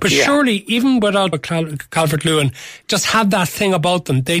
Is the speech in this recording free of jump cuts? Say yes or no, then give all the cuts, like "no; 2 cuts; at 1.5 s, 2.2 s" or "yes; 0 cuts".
no; 2 cuts; at 1.3 s, 2.8 s